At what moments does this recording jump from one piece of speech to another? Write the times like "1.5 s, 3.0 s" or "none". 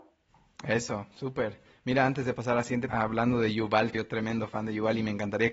2.9 s, 3.9 s